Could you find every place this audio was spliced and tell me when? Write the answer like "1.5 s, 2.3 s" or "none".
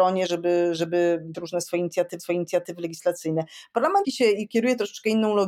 1.3 s, 2.2 s, 4.0 s